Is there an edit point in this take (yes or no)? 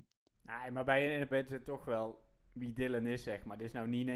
yes